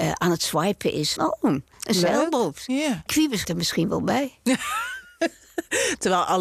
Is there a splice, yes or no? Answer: yes